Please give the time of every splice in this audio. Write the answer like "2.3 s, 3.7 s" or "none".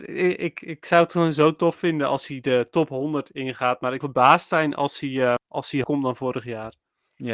4.0 s, 5.4 s, 5.8 s